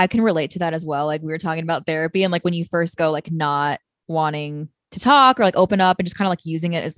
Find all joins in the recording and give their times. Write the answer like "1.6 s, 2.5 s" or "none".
none

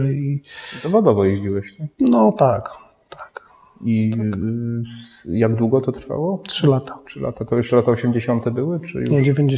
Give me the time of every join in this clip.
none

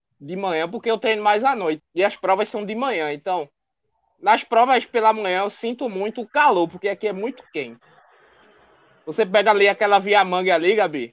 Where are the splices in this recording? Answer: 1.8 s

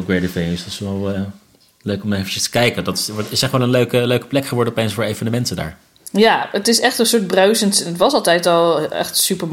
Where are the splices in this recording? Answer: none

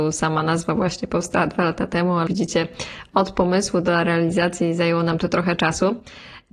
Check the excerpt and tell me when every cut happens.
2.3 s

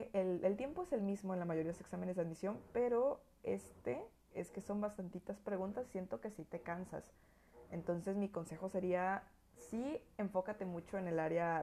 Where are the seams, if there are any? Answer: none

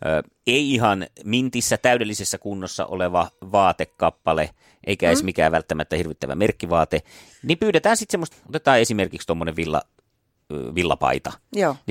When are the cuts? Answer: 8.3 s

